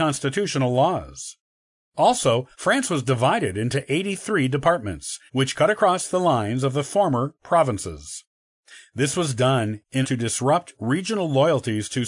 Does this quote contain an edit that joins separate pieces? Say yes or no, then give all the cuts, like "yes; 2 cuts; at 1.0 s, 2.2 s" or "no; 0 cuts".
yes; 3 cuts; at 2.5 s, 5.3 s, 10.0 s